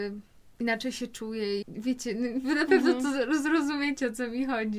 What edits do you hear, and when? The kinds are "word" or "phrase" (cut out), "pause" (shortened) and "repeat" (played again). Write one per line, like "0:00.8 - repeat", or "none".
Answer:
0:01.6 - word